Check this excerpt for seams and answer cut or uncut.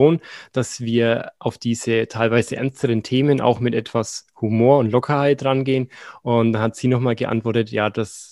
uncut